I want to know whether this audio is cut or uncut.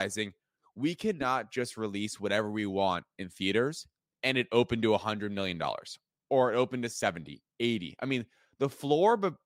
uncut